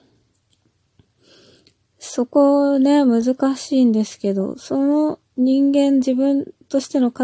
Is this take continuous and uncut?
no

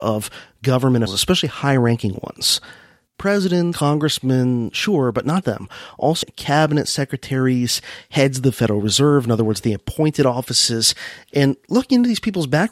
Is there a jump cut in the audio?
yes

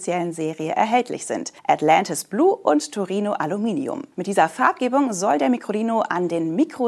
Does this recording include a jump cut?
yes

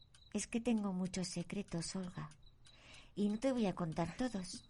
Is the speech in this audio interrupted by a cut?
no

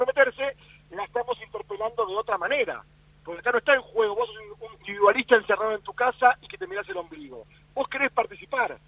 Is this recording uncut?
no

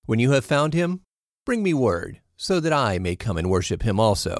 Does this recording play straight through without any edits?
yes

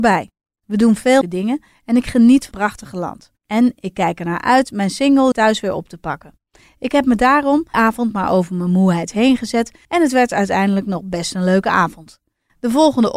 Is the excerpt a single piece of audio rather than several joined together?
no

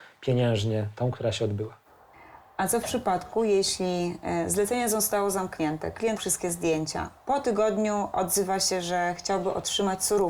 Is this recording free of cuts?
no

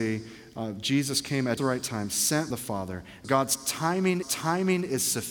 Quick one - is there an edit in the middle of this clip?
yes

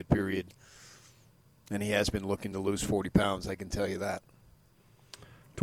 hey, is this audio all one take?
yes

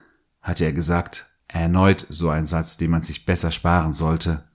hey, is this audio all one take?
no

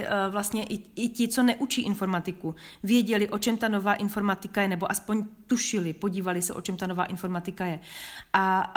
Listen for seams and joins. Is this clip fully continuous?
yes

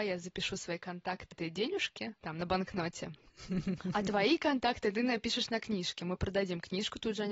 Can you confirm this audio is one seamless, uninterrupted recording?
no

